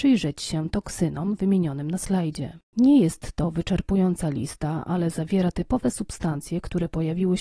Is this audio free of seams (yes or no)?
no